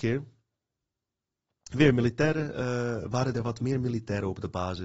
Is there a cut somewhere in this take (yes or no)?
no